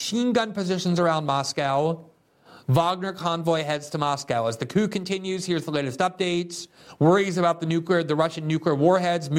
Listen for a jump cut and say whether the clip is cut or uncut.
uncut